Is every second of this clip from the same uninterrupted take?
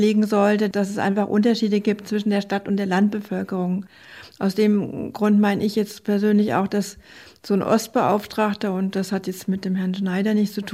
yes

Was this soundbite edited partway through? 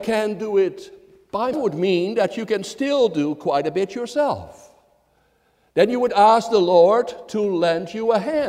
yes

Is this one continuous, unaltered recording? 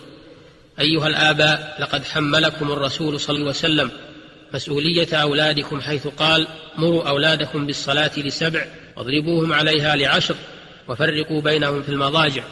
no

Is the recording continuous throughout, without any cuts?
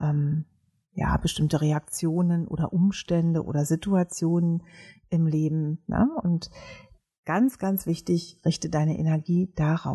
yes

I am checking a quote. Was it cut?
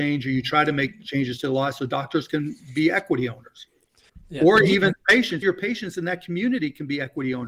yes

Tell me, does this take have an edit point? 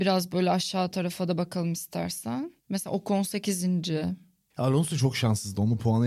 no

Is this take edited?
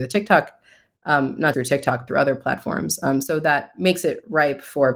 yes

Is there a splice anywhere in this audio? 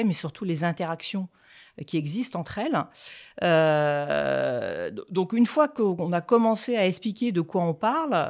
no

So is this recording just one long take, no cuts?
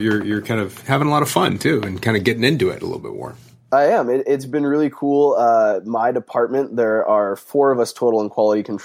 yes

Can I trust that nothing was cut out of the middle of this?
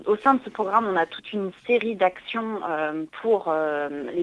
yes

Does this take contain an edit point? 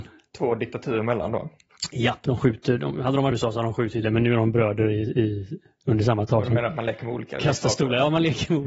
yes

